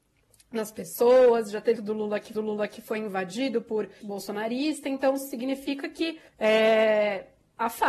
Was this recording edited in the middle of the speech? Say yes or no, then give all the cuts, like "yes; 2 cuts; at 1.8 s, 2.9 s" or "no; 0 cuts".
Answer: yes; 4 cuts; at 1.8 s, 2.3 s, 4.0 s, 6.3 s